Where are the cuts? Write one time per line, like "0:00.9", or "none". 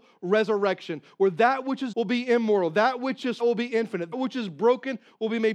0:01.9
0:03.4
0:04.1